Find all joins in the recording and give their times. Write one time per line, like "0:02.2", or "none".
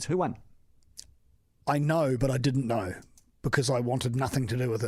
none